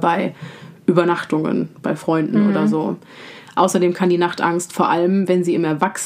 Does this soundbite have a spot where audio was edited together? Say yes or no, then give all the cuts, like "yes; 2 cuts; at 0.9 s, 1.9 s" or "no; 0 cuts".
no; 0 cuts